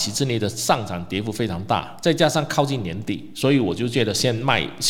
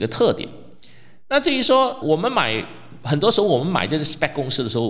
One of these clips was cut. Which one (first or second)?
second